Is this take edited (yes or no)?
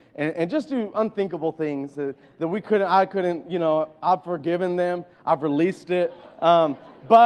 no